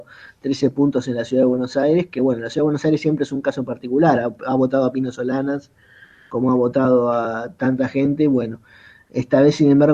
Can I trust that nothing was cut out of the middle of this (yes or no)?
yes